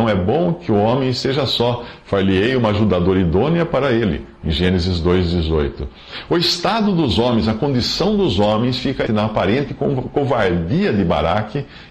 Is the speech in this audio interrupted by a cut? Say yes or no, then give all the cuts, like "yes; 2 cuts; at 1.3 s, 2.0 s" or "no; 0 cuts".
yes; 1 cut; at 9.1 s